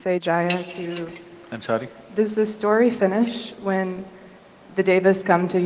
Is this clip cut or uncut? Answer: cut